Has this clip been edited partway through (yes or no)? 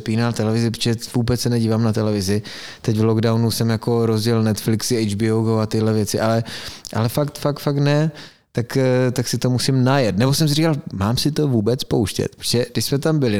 no